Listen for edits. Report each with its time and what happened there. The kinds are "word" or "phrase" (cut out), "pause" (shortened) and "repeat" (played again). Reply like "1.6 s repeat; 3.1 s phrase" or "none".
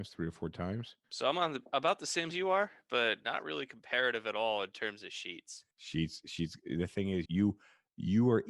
1.0 s pause; 2.3 s phrase; 3.2 s word; 5.7 s pause; 7.3 s word